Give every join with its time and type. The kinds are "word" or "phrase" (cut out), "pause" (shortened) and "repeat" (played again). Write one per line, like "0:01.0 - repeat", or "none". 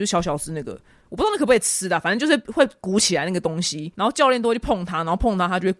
0:03.9 - pause